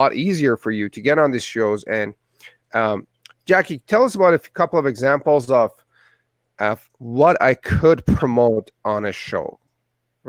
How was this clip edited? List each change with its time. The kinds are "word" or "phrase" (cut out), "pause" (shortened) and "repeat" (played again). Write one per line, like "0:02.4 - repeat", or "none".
none